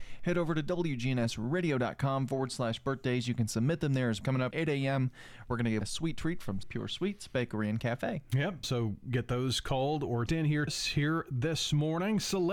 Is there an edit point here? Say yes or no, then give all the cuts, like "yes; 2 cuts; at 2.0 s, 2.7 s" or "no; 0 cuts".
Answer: yes; 7 cuts; at 4.2 s, 4.5 s, 5.8 s, 6.6 s, 8.6 s, 10.3 s, 10.7 s